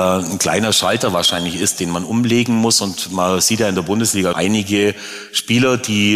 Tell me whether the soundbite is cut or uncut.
cut